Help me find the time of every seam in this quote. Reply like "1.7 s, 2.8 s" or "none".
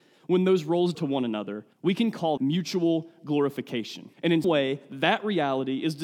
0.9 s, 1.7 s, 2.4 s, 4.1 s, 4.4 s